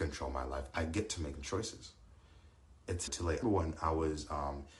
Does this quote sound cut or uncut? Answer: cut